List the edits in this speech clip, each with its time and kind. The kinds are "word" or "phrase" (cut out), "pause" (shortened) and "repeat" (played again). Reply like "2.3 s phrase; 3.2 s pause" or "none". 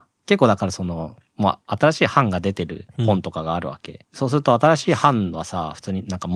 4.0 s pause